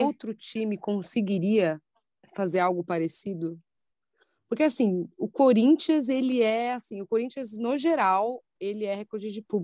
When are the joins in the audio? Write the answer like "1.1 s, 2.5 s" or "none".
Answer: none